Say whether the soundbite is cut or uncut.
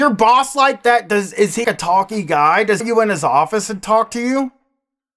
cut